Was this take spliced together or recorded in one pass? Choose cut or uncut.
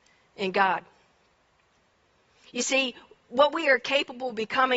uncut